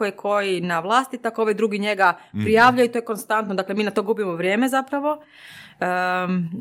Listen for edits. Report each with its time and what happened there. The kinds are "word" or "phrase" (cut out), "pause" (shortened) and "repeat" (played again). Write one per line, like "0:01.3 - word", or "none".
none